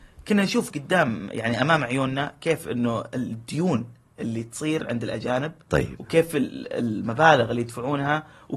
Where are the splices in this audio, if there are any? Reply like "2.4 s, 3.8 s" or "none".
none